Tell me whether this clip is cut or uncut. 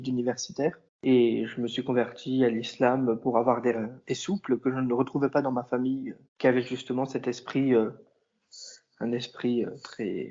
cut